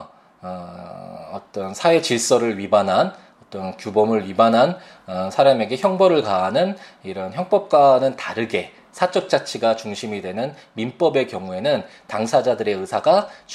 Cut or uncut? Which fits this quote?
uncut